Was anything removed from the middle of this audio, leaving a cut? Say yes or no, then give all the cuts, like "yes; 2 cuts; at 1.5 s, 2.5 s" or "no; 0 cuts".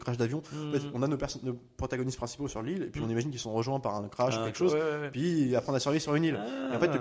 no; 0 cuts